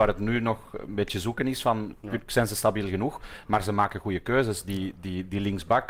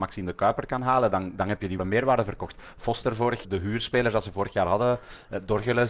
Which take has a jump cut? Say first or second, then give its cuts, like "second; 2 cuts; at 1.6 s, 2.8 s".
second; 2 cuts; at 1.8 s, 3.4 s